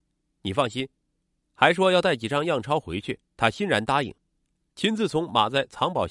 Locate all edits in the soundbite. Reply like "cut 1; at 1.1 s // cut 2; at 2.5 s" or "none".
cut 1; at 1.0 s // cut 2; at 3.3 s